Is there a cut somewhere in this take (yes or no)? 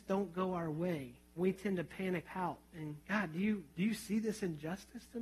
yes